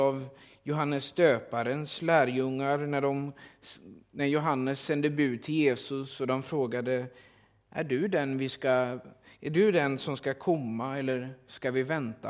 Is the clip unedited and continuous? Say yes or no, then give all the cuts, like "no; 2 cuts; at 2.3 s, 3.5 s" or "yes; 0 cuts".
yes; 0 cuts